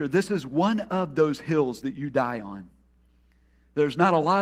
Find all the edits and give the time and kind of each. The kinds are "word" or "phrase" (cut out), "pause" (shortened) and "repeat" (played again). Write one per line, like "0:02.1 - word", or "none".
none